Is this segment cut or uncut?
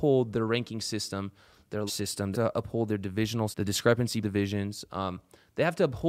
cut